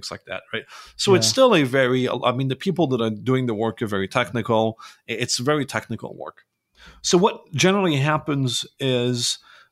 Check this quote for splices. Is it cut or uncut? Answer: uncut